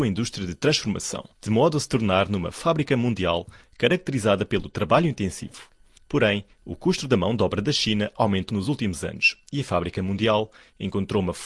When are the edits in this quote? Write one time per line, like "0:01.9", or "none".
0:01.3
0:08.5

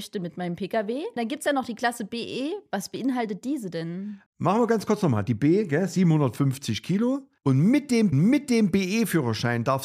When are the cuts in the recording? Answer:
0:01.2
0:08.1

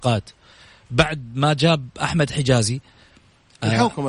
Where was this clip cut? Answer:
none

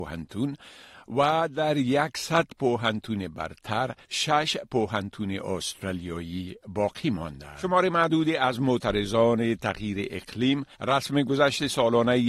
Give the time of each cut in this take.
0:04.0
0:10.7

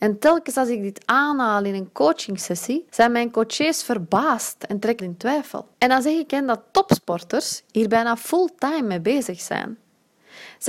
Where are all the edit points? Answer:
0:02.9
0:05.0
0:05.7

